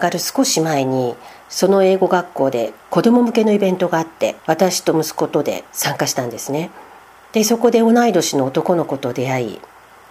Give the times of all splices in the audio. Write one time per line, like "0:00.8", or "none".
0:02.8
0:04.4
0:05.7
0:07.0